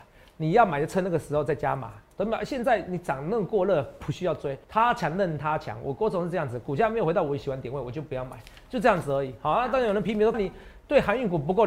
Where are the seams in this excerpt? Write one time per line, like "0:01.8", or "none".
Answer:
0:04.6
0:10.3